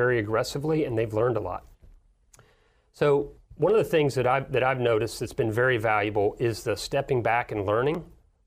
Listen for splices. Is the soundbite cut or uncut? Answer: uncut